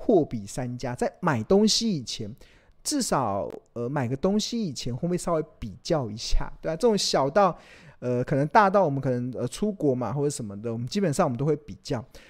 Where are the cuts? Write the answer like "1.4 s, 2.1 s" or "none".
none